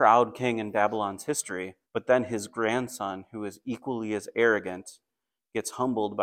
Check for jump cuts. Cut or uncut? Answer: cut